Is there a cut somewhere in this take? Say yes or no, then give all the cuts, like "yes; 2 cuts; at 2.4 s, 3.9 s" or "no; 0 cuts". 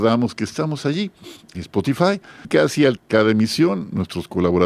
yes; 3 cuts; at 1.5 s, 2.4 s, 3.0 s